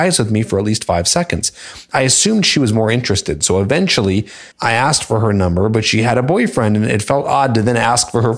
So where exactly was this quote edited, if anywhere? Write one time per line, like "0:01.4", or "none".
0:04.5